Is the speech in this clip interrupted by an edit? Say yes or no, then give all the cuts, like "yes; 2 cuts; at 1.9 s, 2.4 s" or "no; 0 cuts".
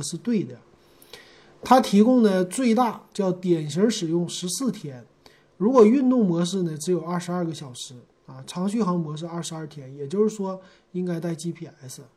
no; 0 cuts